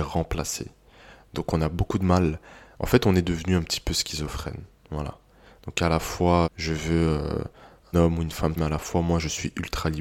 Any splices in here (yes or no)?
yes